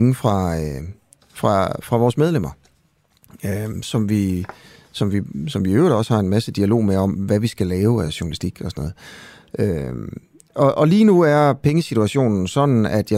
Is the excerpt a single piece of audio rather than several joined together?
yes; 0 cuts

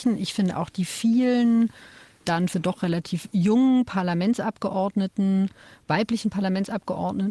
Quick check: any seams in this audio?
yes; 1 cut; at 2.5 s

